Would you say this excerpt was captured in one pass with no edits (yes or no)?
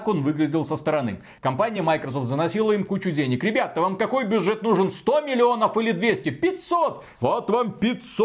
yes